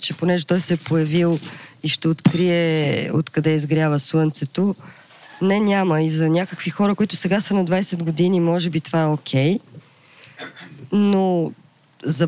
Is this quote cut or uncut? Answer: uncut